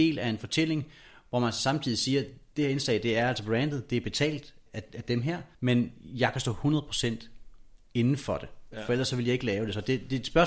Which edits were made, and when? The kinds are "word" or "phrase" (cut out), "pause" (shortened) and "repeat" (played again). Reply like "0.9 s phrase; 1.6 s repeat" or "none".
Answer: 4.7 s word; 5.5 s pause